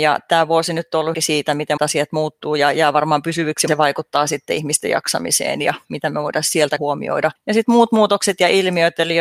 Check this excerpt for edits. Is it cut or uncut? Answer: cut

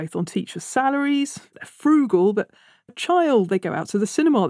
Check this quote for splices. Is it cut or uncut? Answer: cut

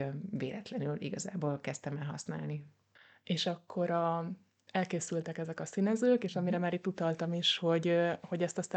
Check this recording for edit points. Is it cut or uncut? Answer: uncut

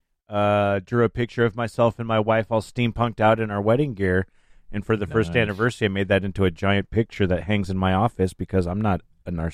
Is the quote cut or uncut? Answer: uncut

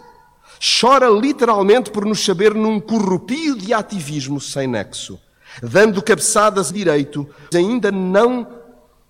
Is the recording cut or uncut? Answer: cut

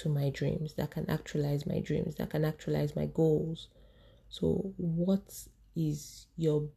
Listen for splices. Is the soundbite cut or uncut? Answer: uncut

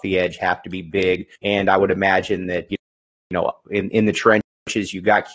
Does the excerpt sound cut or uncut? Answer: cut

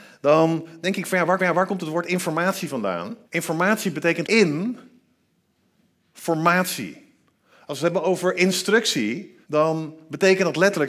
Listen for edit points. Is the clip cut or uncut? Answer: cut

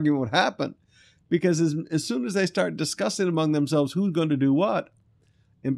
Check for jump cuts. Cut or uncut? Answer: uncut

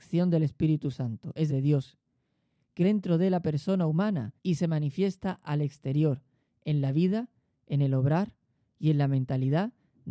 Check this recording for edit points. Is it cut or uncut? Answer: cut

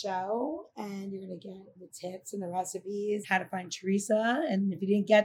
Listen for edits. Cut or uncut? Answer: cut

